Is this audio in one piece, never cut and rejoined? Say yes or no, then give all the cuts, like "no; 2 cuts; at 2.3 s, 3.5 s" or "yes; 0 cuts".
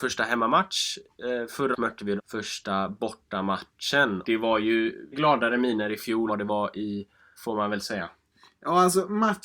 no; 6 cuts; at 1.7 s, 2.2 s, 4.2 s, 5.1 s, 6.3 s, 7.4 s